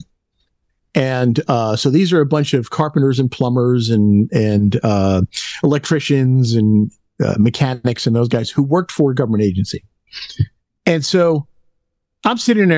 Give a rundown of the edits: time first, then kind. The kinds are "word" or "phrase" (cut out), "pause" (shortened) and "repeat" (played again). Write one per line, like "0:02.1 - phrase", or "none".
none